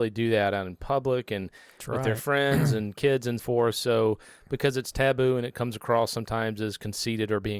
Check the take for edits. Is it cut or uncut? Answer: cut